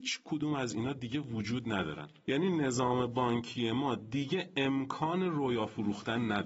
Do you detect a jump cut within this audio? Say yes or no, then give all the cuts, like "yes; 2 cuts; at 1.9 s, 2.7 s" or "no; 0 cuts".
no; 0 cuts